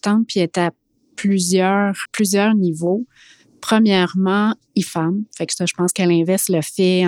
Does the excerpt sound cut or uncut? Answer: cut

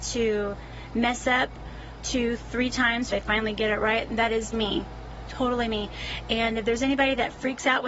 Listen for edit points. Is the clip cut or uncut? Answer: cut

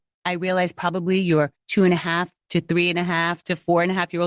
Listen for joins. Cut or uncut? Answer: uncut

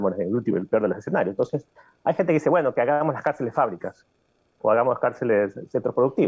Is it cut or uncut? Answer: uncut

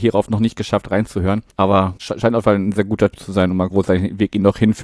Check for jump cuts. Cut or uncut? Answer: cut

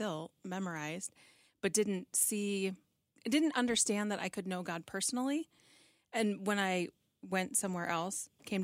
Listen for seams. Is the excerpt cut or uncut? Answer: uncut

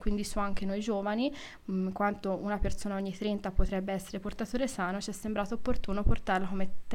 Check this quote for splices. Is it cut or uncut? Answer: uncut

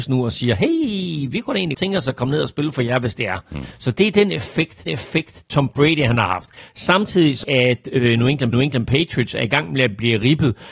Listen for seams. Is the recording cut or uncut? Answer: cut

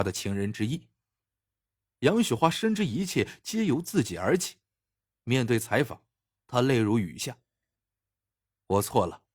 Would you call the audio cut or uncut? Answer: uncut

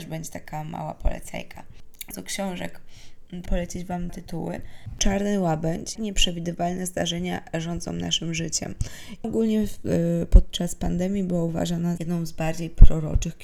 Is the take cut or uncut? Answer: cut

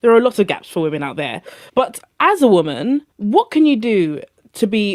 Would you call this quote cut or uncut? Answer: cut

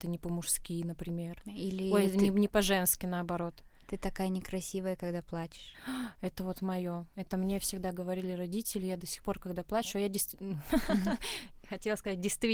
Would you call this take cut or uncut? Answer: uncut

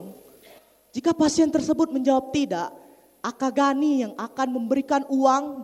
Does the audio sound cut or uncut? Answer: uncut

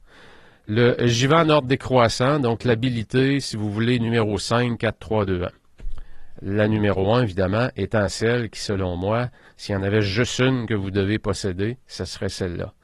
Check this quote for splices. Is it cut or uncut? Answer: uncut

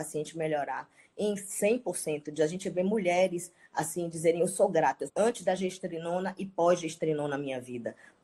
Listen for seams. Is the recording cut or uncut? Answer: cut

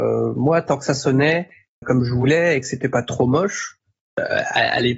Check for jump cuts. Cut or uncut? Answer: cut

